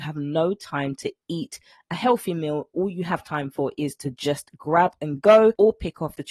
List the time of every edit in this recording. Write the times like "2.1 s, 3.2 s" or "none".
none